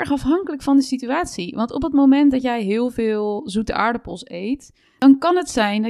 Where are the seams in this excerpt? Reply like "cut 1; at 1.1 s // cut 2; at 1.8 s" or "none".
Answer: none